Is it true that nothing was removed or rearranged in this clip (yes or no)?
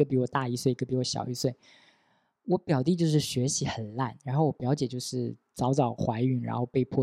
yes